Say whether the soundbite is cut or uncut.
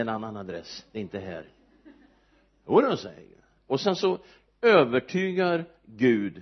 uncut